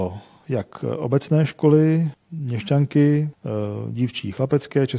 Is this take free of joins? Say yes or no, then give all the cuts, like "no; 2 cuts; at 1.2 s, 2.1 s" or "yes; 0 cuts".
yes; 0 cuts